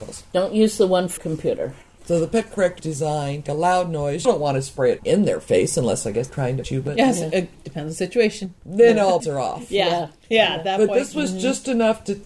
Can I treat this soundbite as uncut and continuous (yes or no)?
no